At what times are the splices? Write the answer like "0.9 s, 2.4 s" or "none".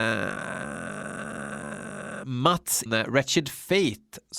2.9 s